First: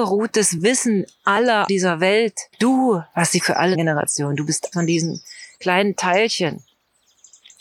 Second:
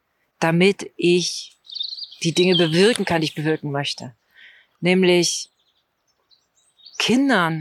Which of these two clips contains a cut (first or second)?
first